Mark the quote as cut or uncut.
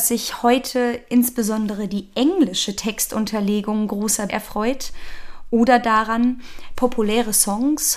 cut